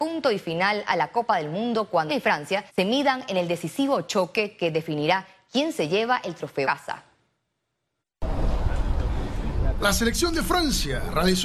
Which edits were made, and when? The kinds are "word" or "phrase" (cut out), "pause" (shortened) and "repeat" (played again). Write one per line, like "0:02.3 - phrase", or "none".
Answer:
0:02.1 - word
0:02.7 - pause
0:06.6 - word